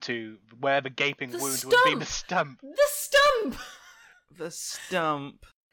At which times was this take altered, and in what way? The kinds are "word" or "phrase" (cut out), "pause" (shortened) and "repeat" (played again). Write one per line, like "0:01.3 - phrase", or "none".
none